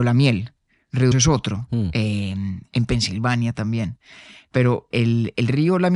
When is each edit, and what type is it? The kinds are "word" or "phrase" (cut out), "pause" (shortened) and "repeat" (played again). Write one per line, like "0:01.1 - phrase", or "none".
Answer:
0:01.1 - word
0:04.9 - word